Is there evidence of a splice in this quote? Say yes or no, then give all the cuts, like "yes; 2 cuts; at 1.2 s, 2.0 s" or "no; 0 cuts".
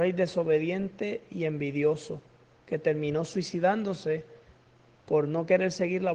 no; 0 cuts